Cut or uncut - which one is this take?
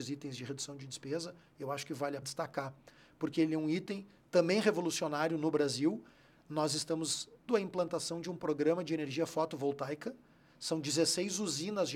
cut